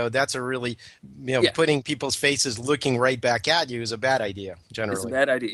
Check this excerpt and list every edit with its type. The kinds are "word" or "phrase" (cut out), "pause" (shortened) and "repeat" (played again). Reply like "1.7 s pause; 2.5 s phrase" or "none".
none